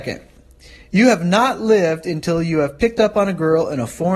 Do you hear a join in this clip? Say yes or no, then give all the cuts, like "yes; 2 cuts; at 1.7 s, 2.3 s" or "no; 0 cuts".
no; 0 cuts